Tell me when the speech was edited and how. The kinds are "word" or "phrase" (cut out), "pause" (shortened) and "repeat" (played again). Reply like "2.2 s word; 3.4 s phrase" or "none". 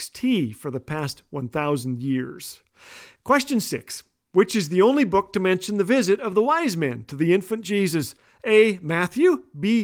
none